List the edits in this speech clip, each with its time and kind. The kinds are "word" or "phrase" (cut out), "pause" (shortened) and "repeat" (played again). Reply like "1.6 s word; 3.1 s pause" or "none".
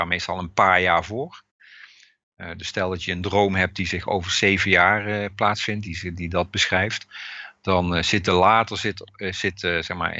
none